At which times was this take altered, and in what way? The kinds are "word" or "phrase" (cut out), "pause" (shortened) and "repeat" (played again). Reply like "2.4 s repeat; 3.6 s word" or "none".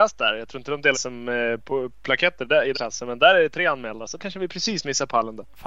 0.9 s word; 2.7 s word; 4.2 s word